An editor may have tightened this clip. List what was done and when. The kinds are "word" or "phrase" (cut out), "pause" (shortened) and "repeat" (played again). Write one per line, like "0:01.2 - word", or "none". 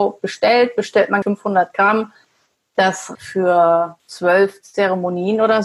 0:01.2 - word
0:03.1 - word
0:04.0 - pause

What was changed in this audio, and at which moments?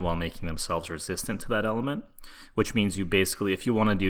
none

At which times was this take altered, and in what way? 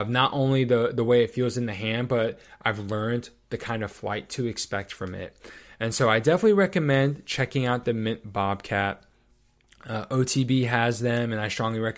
none

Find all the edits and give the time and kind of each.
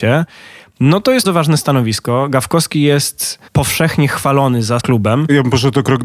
0:01.2 - word
0:03.5 - pause
0:04.8 - phrase

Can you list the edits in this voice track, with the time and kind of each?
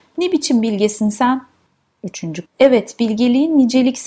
0:02.5 - word

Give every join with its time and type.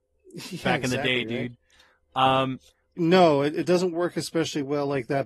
0:03.0 - phrase

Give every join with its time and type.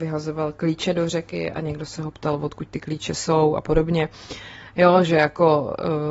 none

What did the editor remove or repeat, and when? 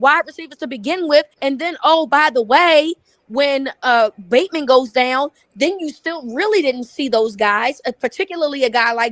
0:01.3 - pause

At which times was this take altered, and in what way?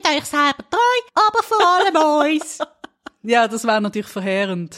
0:01.1 - pause

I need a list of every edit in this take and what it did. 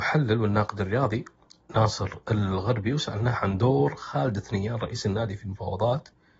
none

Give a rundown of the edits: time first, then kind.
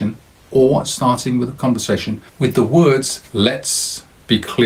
0:01.6 - word
0:02.3 - pause
0:03.3 - pause

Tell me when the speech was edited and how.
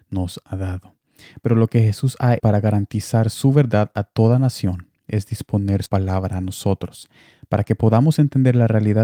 0:02.4 - word
0:05.9 - word

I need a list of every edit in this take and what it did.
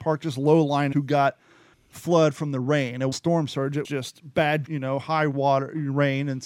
0:00.9 - word
0:01.7 - pause
0:03.1 - word
0:03.8 - word
0:04.7 - word

